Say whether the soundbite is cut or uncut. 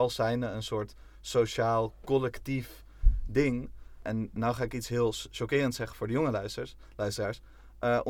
uncut